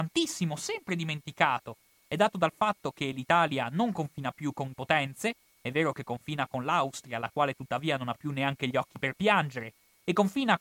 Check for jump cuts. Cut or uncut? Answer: cut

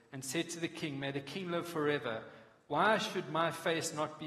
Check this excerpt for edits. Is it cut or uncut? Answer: uncut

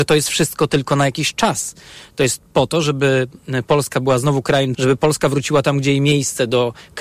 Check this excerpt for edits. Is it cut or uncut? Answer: cut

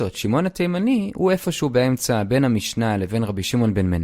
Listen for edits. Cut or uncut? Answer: uncut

